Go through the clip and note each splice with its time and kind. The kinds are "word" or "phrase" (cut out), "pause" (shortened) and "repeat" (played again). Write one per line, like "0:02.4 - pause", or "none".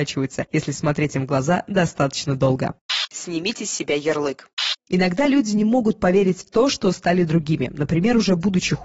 none